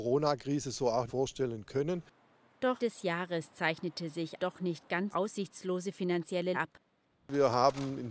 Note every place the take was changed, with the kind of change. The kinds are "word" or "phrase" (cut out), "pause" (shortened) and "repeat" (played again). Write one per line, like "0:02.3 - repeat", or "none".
0:01.1 - word
0:02.8 - word
0:04.4 - word
0:05.1 - word
0:06.5 - word